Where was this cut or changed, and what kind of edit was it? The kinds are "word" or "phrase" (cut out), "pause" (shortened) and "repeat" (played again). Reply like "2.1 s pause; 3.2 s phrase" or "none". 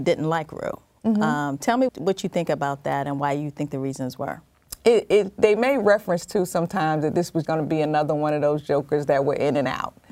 1.9 s word; 7.4 s word